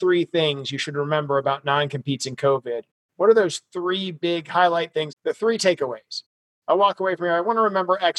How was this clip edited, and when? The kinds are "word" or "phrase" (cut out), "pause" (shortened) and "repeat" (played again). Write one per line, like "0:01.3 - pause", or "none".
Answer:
0:05.1 - word